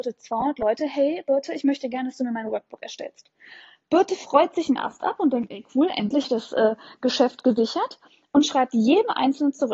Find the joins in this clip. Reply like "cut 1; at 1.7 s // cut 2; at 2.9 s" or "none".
cut 1; at 6.2 s